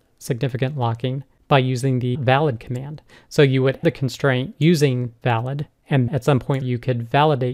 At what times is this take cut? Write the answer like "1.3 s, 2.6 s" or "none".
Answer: 2.1 s, 3.8 s, 5.2 s, 6.1 s, 6.6 s